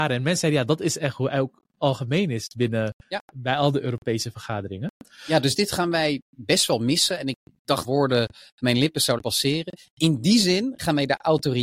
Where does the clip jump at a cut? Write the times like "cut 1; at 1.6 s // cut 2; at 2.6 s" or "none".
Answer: cut 1; at 3.0 s // cut 2; at 7.8 s // cut 3; at 9.2 s